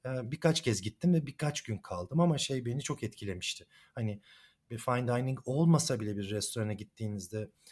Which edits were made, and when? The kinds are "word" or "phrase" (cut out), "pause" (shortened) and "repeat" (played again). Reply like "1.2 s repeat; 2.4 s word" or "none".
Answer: none